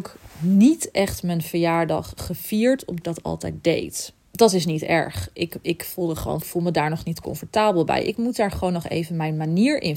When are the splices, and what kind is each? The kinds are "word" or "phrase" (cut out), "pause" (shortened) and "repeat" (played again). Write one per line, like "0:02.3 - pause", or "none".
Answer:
0:03.0 - phrase
0:04.2 - pause
0:06.4 - phrase